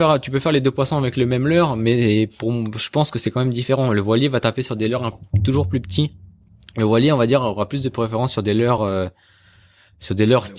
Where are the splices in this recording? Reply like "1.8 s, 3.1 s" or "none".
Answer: none